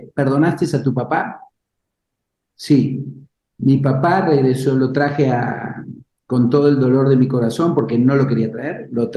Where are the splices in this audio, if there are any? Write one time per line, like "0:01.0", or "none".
none